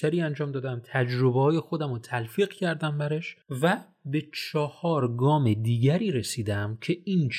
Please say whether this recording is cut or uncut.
cut